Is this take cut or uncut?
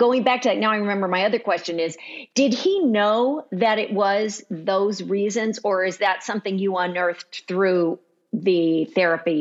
uncut